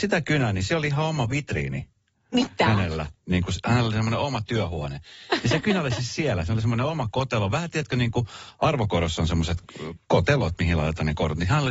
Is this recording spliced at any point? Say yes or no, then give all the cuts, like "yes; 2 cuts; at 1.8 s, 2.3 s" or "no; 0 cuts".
no; 0 cuts